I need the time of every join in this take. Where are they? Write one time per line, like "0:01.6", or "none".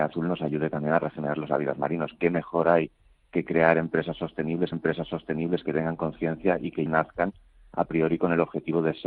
0:04.7
0:06.9